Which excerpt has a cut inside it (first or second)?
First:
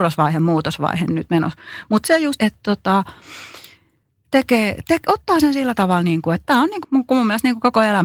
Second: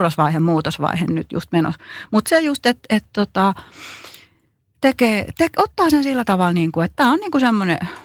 first